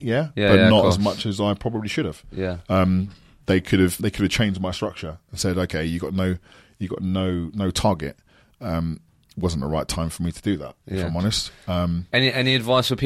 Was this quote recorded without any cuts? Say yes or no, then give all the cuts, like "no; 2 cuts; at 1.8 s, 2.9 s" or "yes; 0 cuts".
no; 1 cut; at 4.0 s